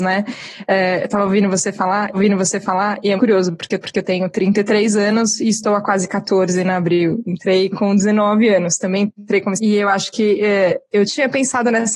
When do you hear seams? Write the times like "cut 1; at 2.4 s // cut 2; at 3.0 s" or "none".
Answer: cut 1; at 2.1 s // cut 2; at 3.2 s // cut 3; at 3.8 s // cut 4; at 9.6 s // cut 5; at 11.1 s

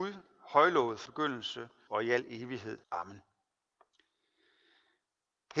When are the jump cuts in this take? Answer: cut 1; at 1.1 s // cut 2; at 1.9 s // cut 3; at 2.8 s

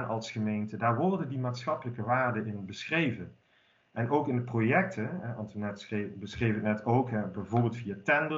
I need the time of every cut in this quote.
none

